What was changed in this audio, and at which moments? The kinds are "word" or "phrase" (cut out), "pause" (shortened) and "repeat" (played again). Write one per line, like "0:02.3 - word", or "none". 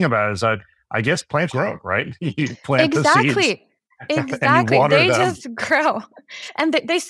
0:01.5 - word